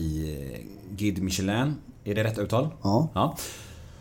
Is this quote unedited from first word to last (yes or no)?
yes